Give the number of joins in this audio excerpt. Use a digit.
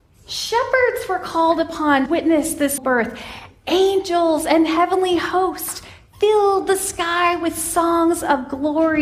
2